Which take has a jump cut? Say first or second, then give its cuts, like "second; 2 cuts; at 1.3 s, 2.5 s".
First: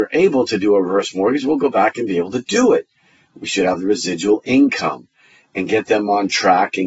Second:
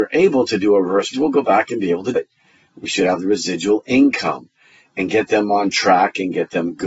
second; 2 cuts; at 1.1 s, 2.2 s